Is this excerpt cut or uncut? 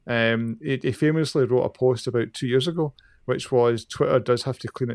uncut